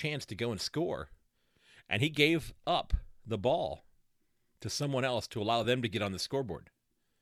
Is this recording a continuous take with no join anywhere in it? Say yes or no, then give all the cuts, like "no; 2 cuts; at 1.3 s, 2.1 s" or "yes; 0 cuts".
yes; 0 cuts